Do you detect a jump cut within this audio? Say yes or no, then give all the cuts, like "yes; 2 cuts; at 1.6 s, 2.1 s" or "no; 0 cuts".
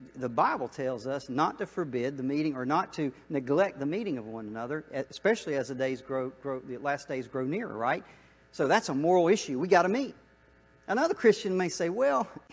no; 0 cuts